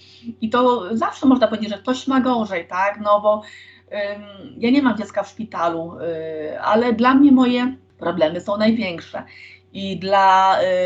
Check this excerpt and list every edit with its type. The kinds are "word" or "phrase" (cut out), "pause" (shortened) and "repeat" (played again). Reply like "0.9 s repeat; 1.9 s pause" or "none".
none